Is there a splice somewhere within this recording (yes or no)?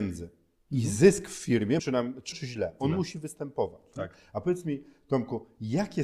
yes